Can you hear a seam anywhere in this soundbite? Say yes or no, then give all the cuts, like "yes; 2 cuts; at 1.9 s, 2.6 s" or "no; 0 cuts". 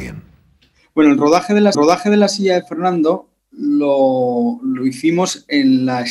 yes; 1 cut; at 1.7 s